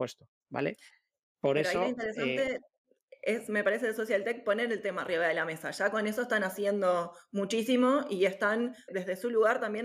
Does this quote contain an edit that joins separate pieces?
yes; 1 cut; at 8.9 s

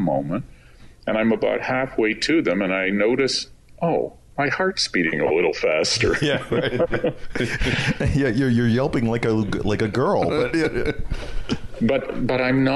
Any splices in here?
no; 0 cuts

